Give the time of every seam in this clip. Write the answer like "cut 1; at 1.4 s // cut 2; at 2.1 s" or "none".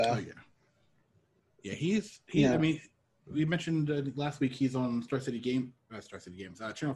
none